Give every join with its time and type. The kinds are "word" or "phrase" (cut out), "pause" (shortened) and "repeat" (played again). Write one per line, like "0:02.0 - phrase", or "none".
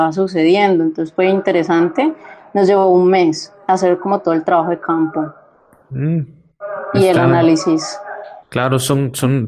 0:08.4 - pause